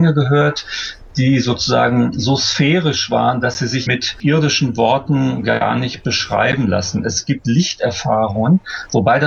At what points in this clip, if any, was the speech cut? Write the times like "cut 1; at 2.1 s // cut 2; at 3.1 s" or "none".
cut 1; at 3.9 s